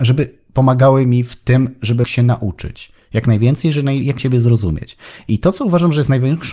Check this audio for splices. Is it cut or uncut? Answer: cut